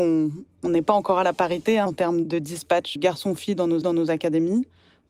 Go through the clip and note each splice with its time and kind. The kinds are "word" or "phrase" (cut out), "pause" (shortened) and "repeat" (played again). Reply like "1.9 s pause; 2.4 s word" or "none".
1.9 s word; 3.0 s word; 3.8 s repeat